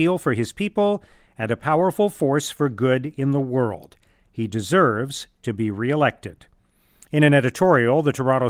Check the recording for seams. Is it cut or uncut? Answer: uncut